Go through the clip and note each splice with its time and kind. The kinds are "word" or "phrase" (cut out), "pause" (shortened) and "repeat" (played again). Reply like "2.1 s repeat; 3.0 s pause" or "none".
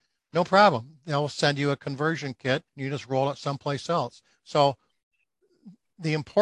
2.7 s pause